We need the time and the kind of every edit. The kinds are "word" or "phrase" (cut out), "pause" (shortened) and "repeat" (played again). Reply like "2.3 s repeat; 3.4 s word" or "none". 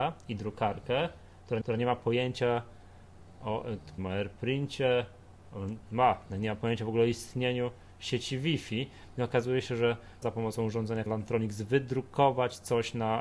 1.6 s repeat; 4.0 s word; 10.2 s word; 11.1 s word